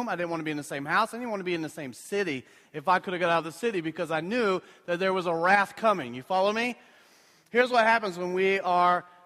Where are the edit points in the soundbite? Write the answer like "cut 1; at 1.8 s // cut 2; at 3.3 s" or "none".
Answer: none